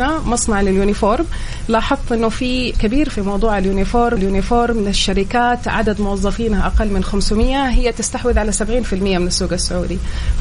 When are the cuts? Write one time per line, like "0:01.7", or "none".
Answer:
0:02.7
0:03.1
0:04.2